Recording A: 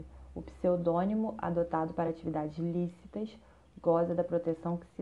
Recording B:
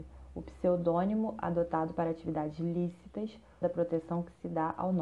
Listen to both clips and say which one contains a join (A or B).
B